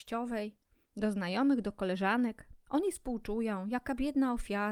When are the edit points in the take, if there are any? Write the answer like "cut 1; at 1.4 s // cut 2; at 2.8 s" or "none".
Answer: none